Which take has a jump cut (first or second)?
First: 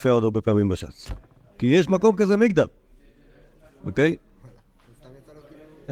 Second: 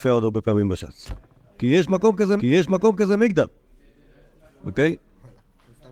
second